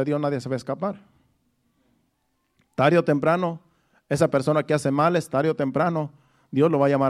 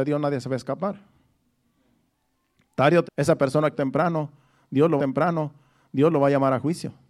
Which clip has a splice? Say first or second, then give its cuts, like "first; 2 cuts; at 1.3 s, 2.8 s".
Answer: second; 3 cuts; at 3.0 s, 3.7 s, 5.0 s